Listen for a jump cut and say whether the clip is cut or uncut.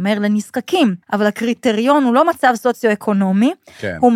cut